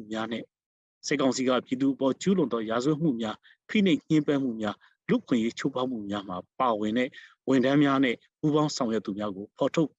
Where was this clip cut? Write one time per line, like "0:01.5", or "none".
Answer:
none